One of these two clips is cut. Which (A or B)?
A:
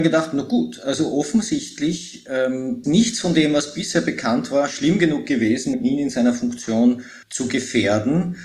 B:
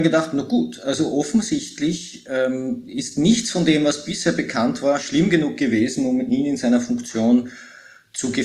A